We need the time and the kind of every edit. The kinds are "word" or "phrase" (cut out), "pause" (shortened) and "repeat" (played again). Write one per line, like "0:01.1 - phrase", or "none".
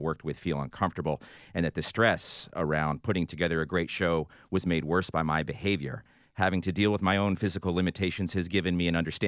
none